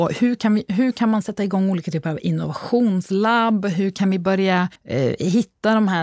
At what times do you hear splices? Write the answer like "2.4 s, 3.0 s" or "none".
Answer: 4.8 s